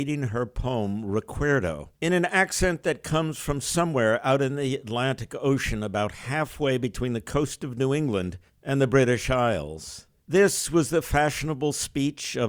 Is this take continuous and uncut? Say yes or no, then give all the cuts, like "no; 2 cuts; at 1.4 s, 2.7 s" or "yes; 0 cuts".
no; 1 cut; at 1.9 s